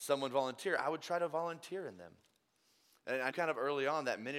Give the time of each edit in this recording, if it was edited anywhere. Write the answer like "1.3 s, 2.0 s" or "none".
3.3 s